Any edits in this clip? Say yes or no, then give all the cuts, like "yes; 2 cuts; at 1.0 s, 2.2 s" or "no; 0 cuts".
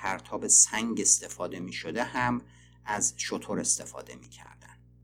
no; 0 cuts